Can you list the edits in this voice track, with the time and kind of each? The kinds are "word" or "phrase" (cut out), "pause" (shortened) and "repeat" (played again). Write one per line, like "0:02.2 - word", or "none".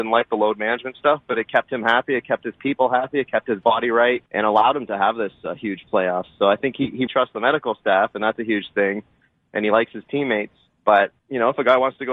0:04.3 - pause
0:07.1 - word
0:11.2 - pause

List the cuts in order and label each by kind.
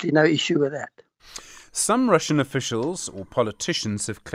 none

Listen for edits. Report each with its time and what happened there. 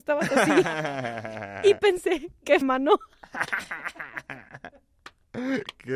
0:02.6 - word

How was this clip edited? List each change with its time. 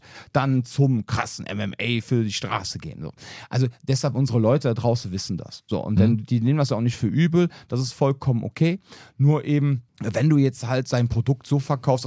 0:09.9 - pause

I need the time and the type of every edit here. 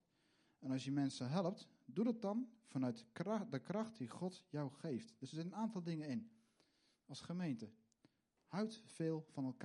none

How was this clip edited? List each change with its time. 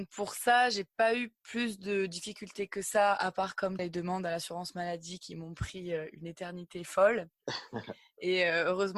0:03.8 - word

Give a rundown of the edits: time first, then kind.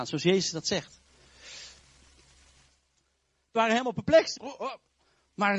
0:03.6 - word
0:04.4 - phrase

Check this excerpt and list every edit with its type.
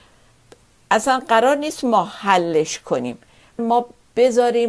0:03.6 - word

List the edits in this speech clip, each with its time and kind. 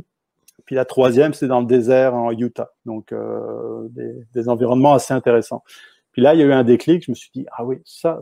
0:02.8 - pause

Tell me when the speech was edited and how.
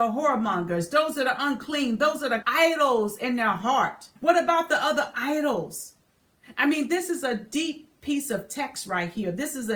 0:02.4 - phrase
0:04.2 - pause

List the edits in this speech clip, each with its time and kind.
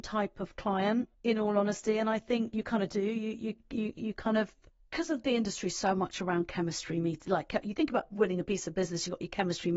0:01.1 - pause
0:04.7 - pause

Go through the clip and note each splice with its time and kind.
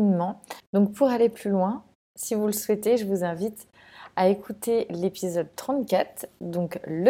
none

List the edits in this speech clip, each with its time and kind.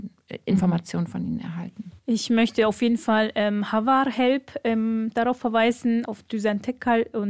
0:02.0 - pause
0:06.0 - word

